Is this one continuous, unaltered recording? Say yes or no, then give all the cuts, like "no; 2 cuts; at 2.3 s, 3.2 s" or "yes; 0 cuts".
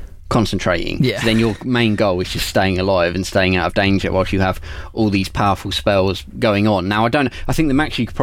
yes; 0 cuts